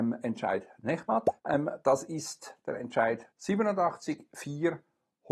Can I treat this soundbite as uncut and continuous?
no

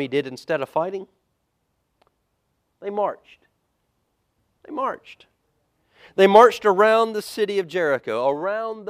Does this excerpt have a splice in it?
no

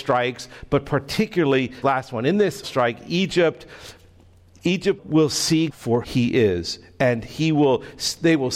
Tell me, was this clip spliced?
yes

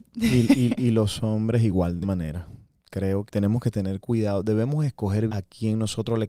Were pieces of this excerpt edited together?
yes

